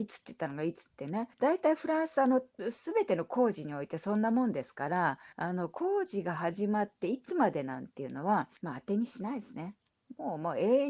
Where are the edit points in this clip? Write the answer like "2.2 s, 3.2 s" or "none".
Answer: 1.3 s, 5.3 s, 8.6 s